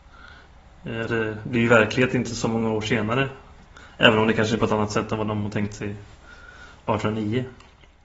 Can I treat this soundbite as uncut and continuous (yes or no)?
no